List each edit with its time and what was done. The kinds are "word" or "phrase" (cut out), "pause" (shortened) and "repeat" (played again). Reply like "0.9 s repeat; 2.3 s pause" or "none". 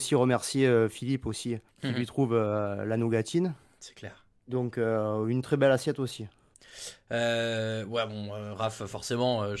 1.7 s pause; 4.4 s pause